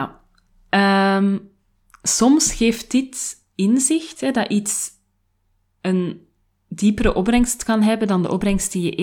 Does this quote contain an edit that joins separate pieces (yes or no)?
no